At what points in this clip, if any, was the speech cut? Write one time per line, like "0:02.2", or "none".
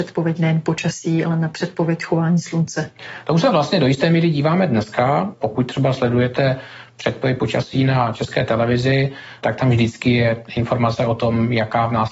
none